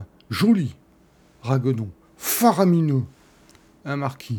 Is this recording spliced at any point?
no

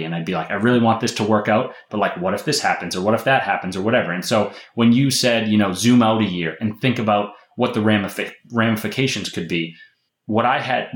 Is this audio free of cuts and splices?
yes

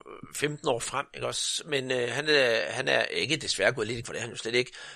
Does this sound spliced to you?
yes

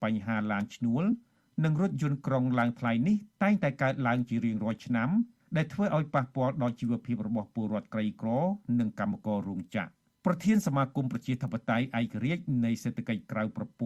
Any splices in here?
no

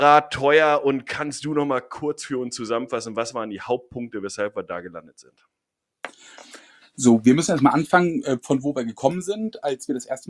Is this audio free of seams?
yes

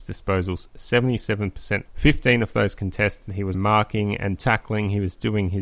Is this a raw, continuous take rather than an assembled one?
no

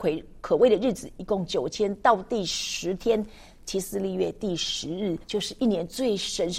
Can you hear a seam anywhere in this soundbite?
yes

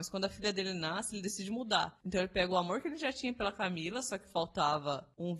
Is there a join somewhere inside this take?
no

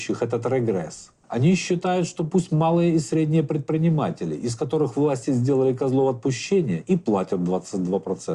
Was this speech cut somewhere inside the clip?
yes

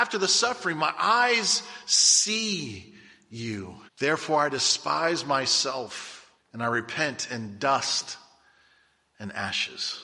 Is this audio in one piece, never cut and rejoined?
no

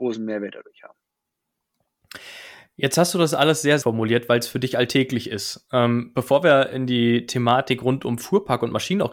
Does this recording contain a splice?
yes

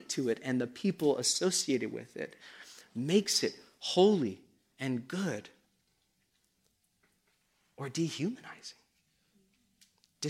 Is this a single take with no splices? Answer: yes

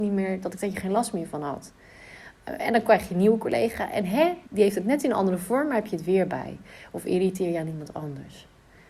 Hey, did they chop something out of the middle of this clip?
yes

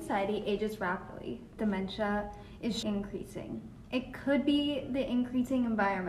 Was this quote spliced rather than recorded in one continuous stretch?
yes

